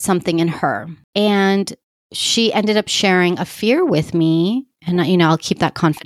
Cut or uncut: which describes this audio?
cut